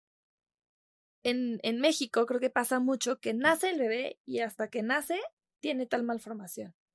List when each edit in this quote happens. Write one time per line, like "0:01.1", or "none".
0:05.6